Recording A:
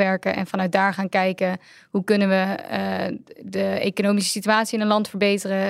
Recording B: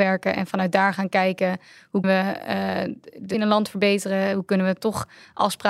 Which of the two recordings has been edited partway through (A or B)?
B